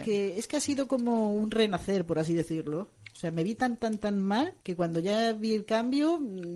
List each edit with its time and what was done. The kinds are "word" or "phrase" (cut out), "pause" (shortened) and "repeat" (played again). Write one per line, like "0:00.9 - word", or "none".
0:04.6 - pause